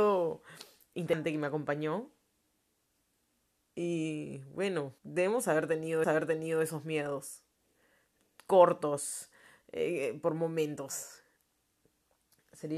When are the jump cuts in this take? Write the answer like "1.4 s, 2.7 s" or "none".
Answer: 0.9 s, 5.0 s, 6.0 s